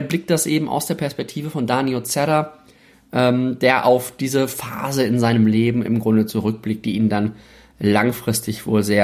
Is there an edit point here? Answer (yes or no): no